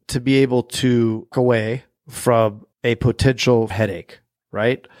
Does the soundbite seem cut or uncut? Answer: cut